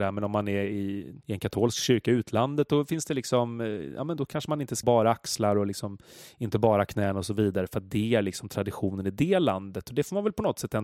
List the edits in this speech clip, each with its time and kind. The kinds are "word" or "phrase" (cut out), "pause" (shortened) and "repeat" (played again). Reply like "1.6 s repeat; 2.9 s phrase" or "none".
1.2 s pause; 4.8 s word